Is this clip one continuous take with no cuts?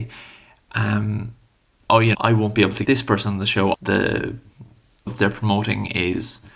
no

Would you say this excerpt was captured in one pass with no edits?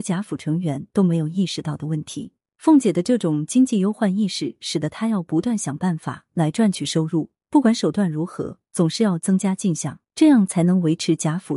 no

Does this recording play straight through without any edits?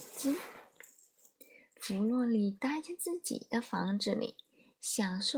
yes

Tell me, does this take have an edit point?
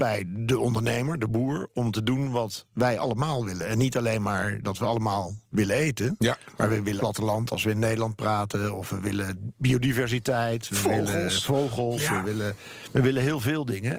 yes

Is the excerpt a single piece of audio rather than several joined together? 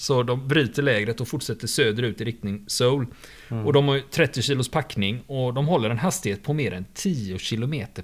yes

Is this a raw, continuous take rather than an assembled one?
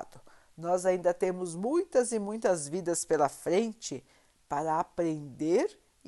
yes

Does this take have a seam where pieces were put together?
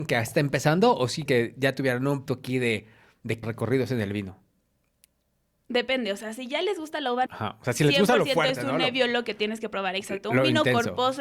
yes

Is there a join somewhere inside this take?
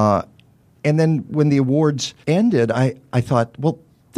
yes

